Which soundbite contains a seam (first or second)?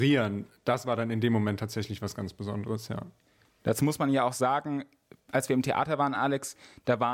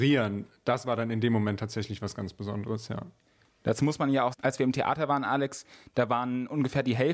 second